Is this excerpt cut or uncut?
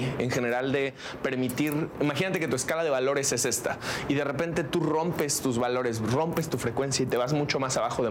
uncut